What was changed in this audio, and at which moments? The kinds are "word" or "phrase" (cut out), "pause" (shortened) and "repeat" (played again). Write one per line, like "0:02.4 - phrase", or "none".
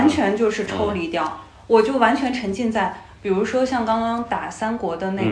none